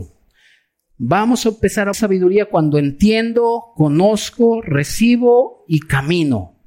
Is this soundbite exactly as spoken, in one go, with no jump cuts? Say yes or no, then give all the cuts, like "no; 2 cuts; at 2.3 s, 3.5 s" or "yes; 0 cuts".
no; 1 cut; at 1.9 s